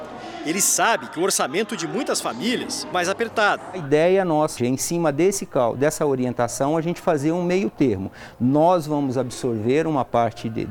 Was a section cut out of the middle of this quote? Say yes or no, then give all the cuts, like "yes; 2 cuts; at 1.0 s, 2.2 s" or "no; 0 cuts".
yes; 2 cuts; at 2.9 s, 4.6 s